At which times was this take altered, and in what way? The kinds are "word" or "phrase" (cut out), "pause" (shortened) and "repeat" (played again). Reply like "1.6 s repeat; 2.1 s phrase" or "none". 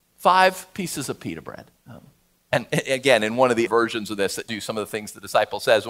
1.8 s pause; 3.7 s word; 4.5 s word